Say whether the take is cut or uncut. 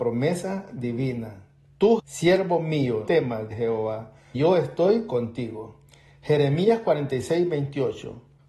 cut